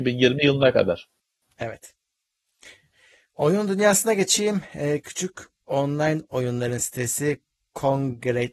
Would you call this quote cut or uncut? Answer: uncut